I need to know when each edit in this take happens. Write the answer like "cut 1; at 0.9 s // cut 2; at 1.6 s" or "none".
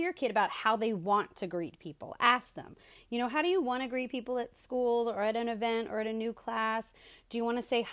none